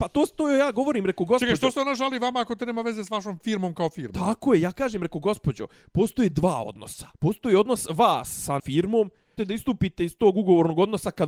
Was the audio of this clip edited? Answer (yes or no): yes